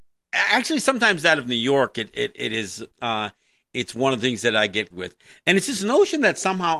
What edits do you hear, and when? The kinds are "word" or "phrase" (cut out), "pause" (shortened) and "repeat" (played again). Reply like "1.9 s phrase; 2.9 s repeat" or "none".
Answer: 2.9 s pause; 4.9 s word